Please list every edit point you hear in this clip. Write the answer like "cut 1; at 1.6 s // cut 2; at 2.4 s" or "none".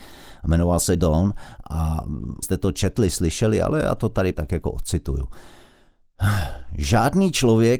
cut 1; at 1.0 s // cut 2; at 2.4 s // cut 3; at 4.3 s